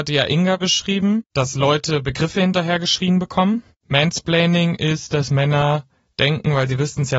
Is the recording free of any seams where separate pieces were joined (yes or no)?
yes